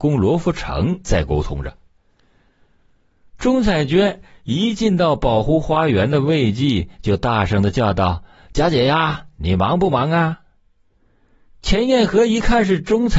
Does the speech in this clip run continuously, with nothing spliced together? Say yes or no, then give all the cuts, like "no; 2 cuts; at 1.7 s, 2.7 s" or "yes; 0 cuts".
yes; 0 cuts